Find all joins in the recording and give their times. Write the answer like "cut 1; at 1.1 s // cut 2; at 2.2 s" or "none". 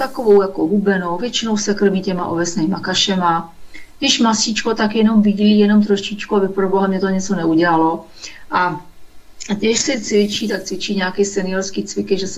none